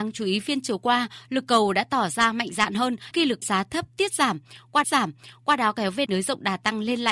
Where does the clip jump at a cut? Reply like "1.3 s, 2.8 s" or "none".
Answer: 3.1 s, 3.4 s, 4.8 s, 6.1 s